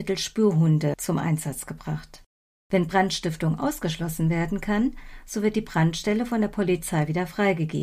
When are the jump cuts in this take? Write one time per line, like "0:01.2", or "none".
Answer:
0:02.3